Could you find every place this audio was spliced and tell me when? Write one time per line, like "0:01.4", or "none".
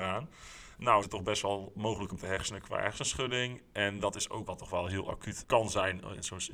0:01.0
0:02.2
0:04.5
0:05.4